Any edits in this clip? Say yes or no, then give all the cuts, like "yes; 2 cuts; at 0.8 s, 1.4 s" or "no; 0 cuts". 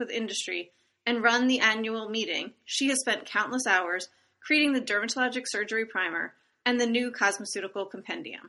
no; 0 cuts